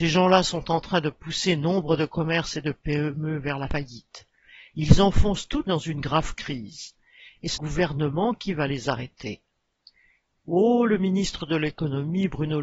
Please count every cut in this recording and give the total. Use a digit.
2